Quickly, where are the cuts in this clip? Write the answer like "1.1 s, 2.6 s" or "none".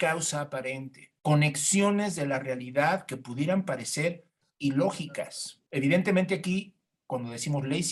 1.2 s, 5.7 s